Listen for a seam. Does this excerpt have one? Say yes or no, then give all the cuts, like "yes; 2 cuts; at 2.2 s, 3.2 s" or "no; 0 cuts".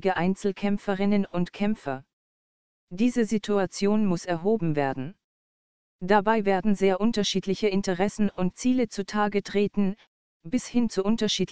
no; 0 cuts